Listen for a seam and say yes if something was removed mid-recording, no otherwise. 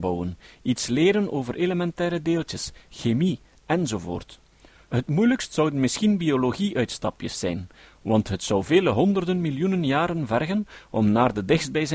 no